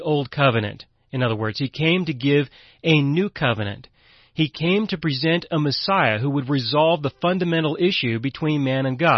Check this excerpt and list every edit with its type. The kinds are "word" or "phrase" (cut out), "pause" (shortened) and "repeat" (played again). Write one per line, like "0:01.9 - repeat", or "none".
none